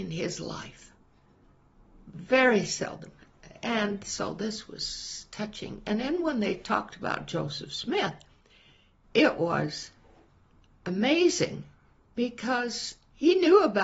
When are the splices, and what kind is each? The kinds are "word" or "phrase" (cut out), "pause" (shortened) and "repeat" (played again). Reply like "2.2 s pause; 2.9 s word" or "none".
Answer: none